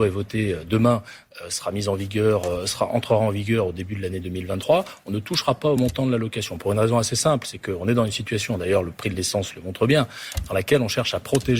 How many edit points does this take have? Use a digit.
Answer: 0